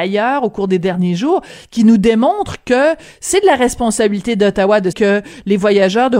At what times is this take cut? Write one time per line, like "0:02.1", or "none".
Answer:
0:04.9